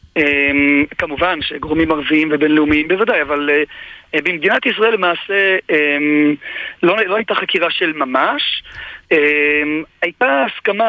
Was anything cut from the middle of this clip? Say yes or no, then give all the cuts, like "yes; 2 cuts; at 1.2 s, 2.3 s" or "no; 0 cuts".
no; 0 cuts